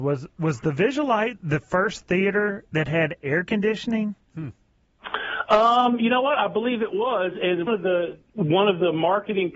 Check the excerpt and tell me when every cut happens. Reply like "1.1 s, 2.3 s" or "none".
7.7 s